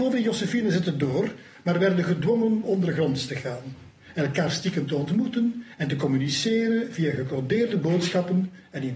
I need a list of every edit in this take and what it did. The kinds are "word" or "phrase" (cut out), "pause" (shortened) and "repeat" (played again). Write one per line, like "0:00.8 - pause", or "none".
0:02.6 - word